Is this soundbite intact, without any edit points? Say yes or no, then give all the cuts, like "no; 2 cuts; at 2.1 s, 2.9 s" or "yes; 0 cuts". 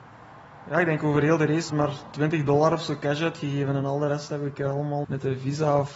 no; 2 cuts; at 1.7 s, 5.0 s